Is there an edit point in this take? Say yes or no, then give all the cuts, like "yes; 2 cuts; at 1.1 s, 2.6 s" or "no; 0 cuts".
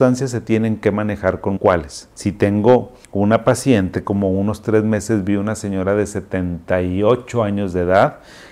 yes; 4 cuts; at 1.6 s, 2.1 s, 3.0 s, 4.0 s